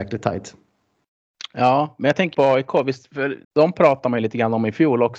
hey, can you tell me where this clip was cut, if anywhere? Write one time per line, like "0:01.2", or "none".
0:02.3
0:03.4